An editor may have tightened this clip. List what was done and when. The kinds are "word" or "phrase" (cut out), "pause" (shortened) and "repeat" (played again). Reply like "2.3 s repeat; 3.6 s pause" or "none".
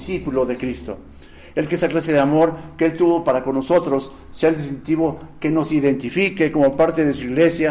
1.7 s word